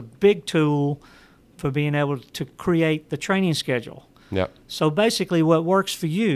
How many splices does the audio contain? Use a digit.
0